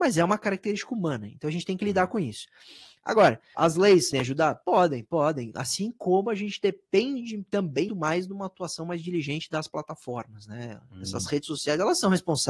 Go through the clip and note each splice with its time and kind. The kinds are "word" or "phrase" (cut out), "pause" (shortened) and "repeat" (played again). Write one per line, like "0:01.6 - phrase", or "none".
0:03.5 - word
0:04.1 - word
0:07.9 - word